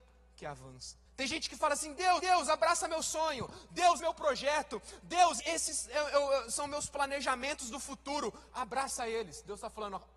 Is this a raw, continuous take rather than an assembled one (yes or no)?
no